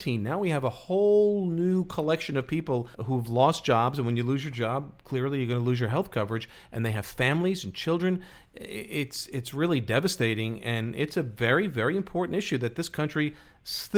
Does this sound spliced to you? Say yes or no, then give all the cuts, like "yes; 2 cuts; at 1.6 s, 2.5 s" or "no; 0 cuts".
yes; 1 cut; at 2.9 s